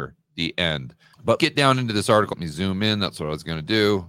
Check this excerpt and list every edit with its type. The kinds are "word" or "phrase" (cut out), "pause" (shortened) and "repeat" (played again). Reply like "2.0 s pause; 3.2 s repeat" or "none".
1.4 s word; 2.3 s word